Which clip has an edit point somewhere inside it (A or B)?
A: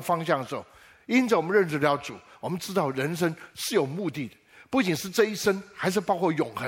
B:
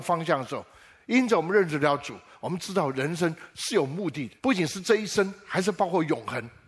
B